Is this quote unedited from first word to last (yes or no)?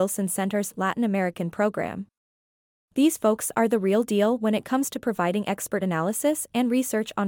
yes